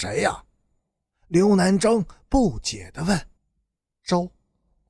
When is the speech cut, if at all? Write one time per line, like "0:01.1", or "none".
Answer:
0:03.4